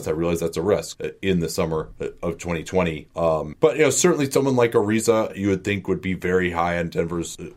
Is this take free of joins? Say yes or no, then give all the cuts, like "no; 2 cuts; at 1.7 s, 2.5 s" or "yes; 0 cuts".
yes; 0 cuts